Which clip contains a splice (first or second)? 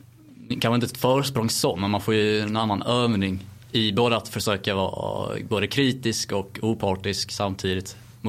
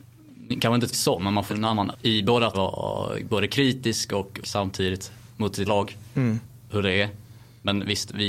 second